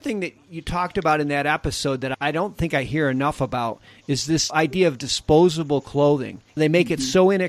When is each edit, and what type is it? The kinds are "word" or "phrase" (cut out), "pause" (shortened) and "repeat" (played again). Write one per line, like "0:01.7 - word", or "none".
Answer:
0:06.5 - pause